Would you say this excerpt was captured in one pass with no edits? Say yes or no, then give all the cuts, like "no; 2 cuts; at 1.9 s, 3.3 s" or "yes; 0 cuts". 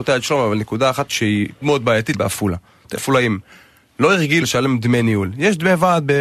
no; 5 cuts; at 1.1 s, 1.6 s, 2.1 s, 3.0 s, 4.4 s